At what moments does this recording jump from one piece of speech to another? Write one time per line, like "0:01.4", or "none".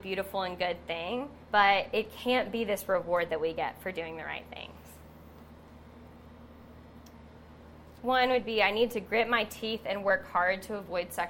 0:01.4
0:08.0

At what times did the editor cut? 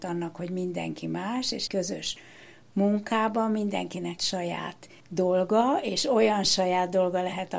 0:01.7
0:04.2
0:05.0

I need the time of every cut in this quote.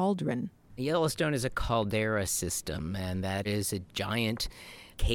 0:03.4

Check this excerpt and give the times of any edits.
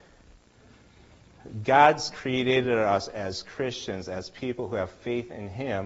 none

